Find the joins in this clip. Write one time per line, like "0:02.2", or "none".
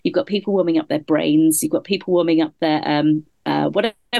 none